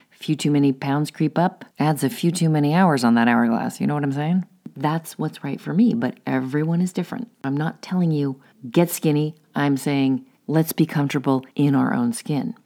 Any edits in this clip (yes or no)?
yes